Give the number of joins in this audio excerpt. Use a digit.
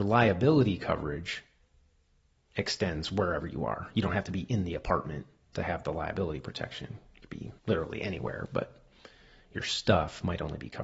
1